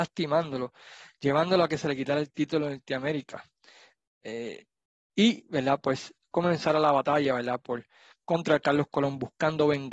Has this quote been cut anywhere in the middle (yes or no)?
no